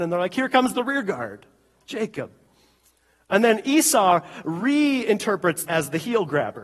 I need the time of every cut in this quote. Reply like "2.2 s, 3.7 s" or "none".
5.6 s